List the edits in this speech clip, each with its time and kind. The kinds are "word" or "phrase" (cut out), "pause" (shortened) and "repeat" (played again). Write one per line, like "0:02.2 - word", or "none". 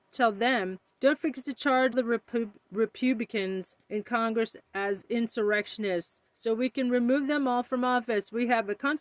0:00.9 - pause
0:01.9 - word
0:03.8 - pause
0:04.6 - pause
0:06.3 - pause